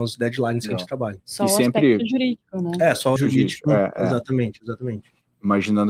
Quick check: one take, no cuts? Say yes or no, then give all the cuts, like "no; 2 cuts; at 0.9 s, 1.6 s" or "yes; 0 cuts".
no; 2 cuts; at 1.2 s, 3.2 s